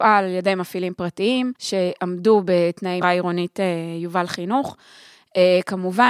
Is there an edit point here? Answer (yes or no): yes